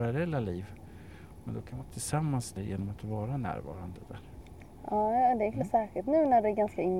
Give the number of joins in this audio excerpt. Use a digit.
2